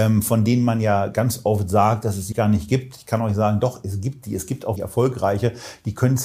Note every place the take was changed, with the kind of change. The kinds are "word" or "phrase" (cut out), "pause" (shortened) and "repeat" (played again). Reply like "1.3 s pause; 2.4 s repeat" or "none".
2.3 s word; 4.8 s word